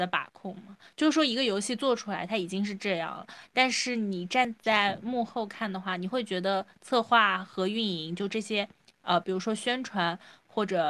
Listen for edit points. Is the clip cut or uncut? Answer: uncut